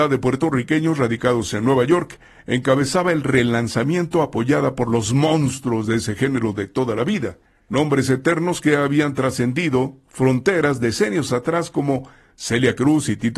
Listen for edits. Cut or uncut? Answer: uncut